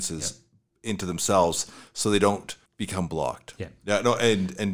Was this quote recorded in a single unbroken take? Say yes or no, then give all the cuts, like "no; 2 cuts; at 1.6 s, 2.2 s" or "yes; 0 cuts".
no; 1 cut; at 2.7 s